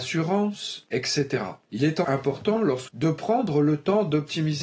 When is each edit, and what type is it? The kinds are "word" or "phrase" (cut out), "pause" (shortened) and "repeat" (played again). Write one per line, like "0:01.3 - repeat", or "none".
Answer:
0:02.0 - word
0:02.9 - phrase